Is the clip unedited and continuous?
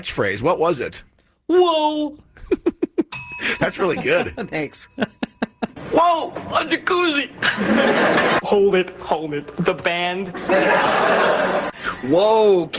no; 1 cut; at 8.4 s

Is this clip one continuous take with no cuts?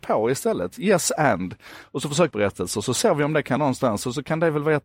no; 2 cuts; at 2.3 s, 3.6 s

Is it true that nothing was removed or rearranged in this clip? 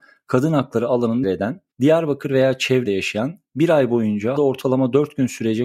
no; 4 cuts; at 1.2 s, 1.7 s, 2.8 s, 4.4 s

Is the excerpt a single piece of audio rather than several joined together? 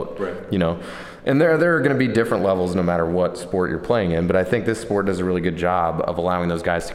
yes; 0 cuts

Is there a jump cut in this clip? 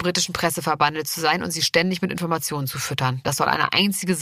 no; 0 cuts

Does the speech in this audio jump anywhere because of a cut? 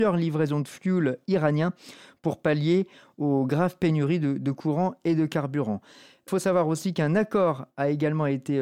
no; 0 cuts

